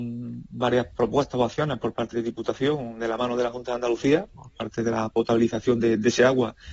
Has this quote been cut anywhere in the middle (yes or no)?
yes